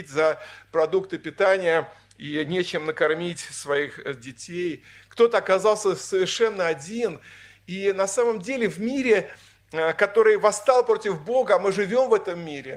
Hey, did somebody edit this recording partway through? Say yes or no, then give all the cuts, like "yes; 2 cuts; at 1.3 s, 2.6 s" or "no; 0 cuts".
no; 0 cuts